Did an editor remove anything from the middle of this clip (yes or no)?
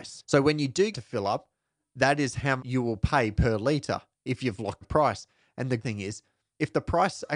yes